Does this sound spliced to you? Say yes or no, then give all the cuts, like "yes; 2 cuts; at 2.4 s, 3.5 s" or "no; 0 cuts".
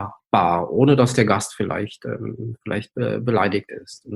no; 0 cuts